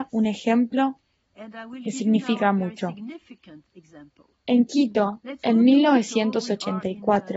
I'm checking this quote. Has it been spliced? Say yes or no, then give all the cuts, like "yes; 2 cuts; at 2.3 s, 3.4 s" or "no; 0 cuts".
no; 0 cuts